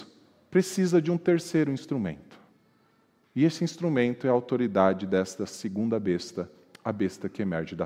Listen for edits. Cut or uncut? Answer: uncut